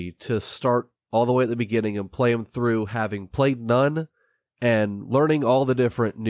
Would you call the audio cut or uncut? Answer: uncut